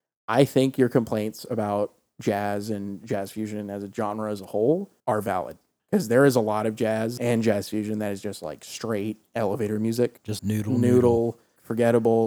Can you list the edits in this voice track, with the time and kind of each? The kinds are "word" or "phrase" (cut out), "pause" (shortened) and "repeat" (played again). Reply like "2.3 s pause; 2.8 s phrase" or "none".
5.0 s pause; 10.4 s word